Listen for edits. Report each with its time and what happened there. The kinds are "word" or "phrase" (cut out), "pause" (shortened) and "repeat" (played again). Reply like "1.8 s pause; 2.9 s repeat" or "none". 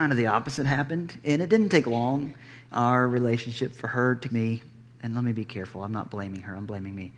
2.7 s word; 4.3 s word